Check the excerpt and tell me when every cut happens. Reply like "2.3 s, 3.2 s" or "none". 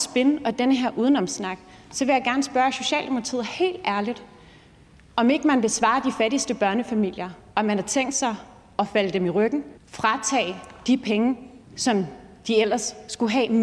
9.8 s, 11.6 s